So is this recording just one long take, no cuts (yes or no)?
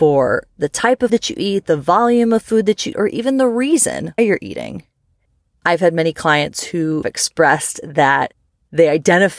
no